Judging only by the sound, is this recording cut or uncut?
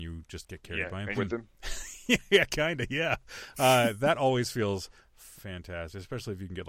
cut